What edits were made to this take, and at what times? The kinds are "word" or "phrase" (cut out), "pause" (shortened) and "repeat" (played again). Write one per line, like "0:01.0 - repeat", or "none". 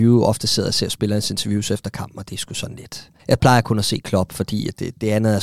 0:03.2 - pause

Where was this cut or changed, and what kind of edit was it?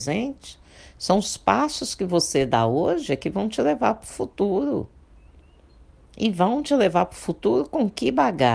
none

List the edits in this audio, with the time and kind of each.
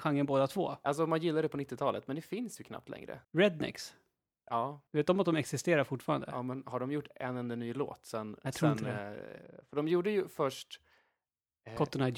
0:03.2 - pause
0:04.9 - pause

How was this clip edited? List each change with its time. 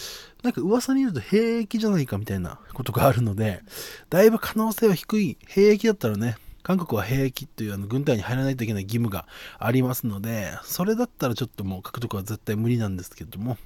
0:02.6 - pause
0:06.6 - pause

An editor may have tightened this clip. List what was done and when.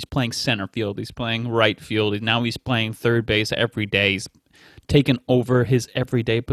none

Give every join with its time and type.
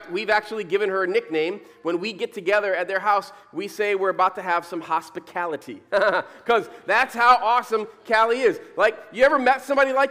none

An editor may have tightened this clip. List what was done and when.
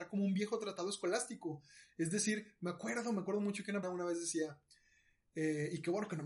0:03.8 - word

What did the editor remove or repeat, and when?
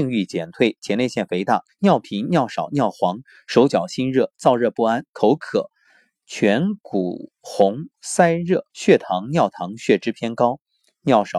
0:01.7 - phrase
0:08.7 - pause

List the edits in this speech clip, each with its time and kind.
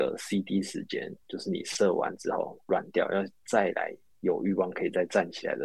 0:04.1 - pause

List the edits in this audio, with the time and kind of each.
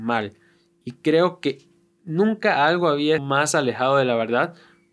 0:03.2 - word

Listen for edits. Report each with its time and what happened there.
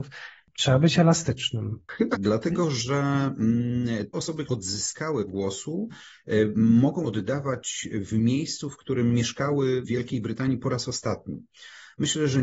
0:02.1 - word
0:04.1 - word
0:04.4 - word
0:05.3 - word
0:07.0 - word
0:09.8 - word

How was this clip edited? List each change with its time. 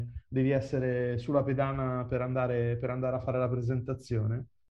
none

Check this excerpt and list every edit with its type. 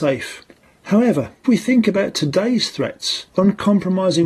0:01.4 - word
0:03.3 - pause

